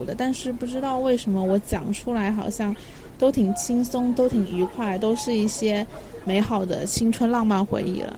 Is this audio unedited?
yes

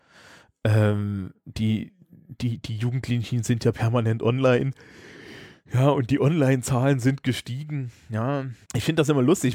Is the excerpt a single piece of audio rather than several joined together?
no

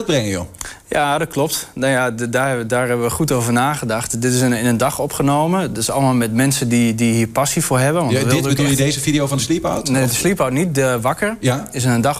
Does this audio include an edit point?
no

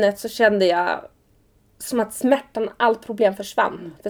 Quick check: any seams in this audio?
no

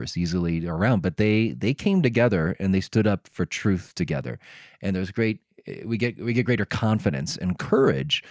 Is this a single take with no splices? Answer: yes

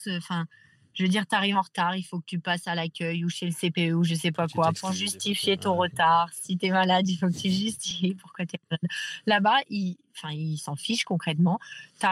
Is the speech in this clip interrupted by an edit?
no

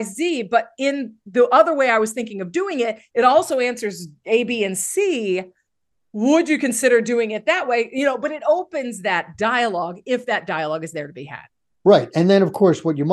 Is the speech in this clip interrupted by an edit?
no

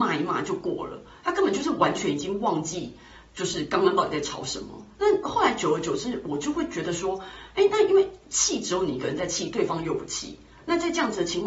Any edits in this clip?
no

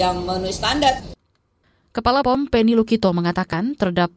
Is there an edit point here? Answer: yes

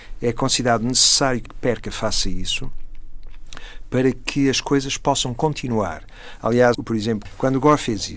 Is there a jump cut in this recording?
yes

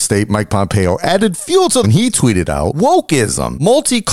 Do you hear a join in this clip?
yes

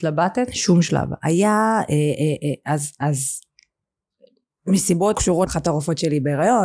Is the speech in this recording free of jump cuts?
no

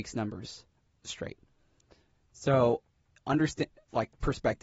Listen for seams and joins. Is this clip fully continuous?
yes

